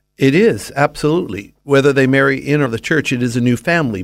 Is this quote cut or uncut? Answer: cut